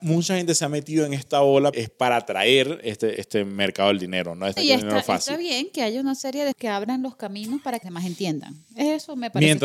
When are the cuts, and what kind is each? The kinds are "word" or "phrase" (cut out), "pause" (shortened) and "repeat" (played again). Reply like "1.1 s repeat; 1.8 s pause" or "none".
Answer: 1.7 s word; 3.2 s word; 4.6 s word; 6.5 s word; 7.8 s word